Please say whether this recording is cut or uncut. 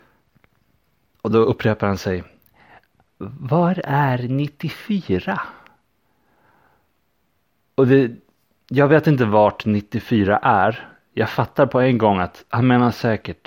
uncut